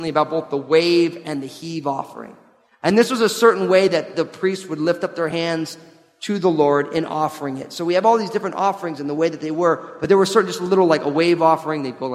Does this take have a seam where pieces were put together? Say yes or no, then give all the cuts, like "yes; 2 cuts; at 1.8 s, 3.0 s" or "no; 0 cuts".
no; 0 cuts